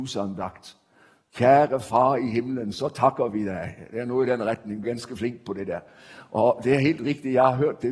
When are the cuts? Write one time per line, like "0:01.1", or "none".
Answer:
0:04.8